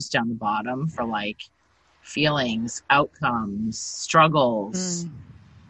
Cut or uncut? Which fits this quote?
uncut